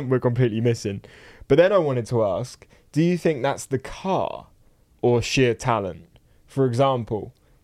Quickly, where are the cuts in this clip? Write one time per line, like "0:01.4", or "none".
none